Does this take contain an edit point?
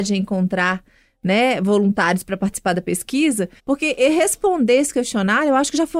yes; 1 cut; at 3.6 s

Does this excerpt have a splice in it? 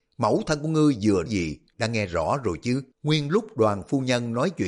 yes; 3 cuts; at 1.3 s, 1.7 s, 2.9 s

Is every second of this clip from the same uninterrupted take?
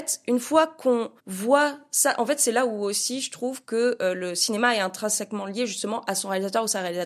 no; 1 cut; at 1.2 s

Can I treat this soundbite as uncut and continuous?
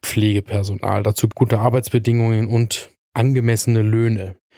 no; 1 cut; at 1.3 s

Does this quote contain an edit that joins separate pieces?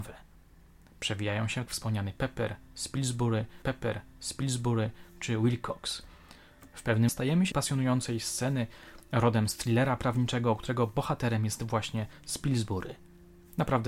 yes; 4 cuts; at 1.7 s, 3.6 s, 7.1 s, 7.5 s

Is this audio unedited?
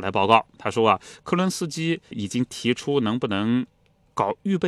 yes; 0 cuts

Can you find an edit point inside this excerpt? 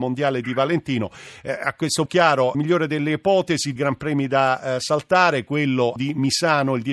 yes; 4 cuts; at 2.1 s, 2.5 s, 3.8 s, 6.0 s

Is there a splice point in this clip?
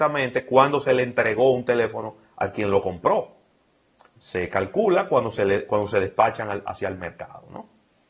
no; 0 cuts

